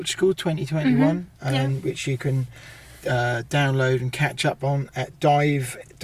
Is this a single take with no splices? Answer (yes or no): yes